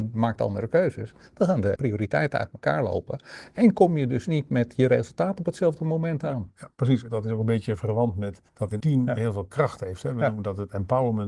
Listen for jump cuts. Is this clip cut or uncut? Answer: cut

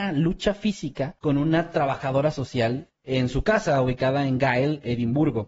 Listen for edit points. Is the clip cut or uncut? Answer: cut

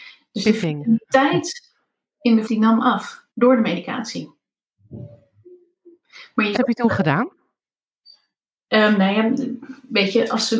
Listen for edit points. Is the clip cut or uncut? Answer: cut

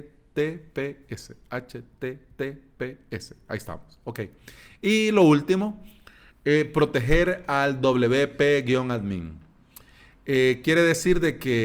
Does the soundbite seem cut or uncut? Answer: uncut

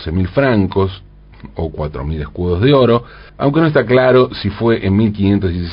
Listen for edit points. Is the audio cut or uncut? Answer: cut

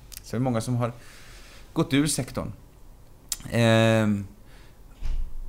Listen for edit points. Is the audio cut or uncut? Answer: uncut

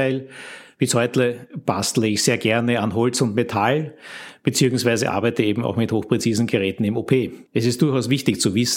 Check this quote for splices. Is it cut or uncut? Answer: cut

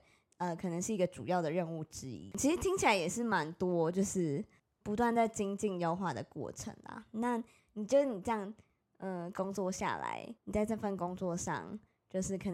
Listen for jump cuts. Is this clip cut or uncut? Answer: cut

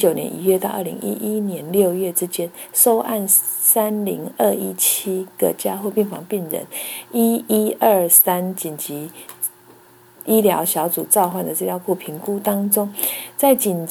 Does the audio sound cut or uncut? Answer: uncut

